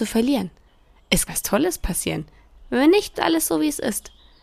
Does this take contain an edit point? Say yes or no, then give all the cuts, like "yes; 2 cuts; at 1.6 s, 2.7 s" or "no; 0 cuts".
yes; 2 cuts; at 1.3 s, 3.1 s